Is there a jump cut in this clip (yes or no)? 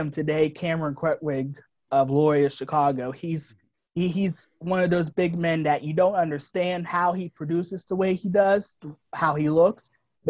no